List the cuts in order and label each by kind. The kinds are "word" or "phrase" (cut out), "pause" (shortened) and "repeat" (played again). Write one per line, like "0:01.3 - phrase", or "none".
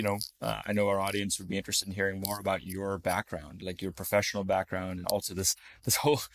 0:05.0 - word